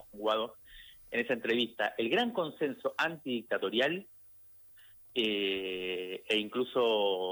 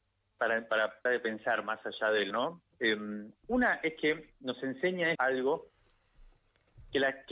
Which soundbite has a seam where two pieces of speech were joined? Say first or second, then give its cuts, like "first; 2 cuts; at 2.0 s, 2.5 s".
second; 4 cuts; at 1.1 s, 2.3 s, 3.4 s, 5.2 s